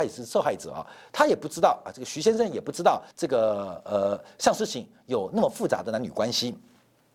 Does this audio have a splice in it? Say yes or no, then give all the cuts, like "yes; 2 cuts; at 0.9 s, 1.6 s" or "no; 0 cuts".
yes; 1 cut; at 3.1 s